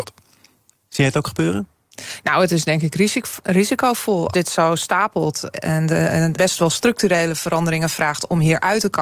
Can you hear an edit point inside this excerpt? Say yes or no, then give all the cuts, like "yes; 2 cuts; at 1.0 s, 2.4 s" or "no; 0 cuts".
yes; 3 cuts; at 4.3 s, 5.5 s, 6.4 s